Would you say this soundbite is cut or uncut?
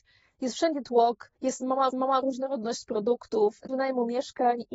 cut